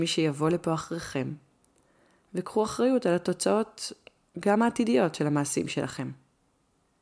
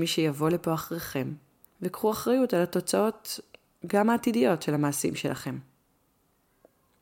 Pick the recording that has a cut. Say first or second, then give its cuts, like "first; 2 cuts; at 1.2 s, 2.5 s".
second; 1 cut; at 1.6 s